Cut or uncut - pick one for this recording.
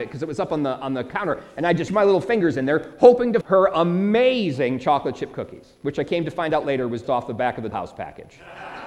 cut